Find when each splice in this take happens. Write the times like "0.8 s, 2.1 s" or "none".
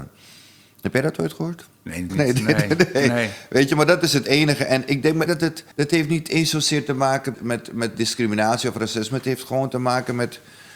2.1 s, 5.3 s, 5.7 s, 7.3 s